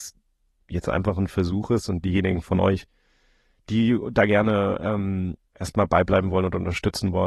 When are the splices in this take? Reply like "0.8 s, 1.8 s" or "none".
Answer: 5.4 s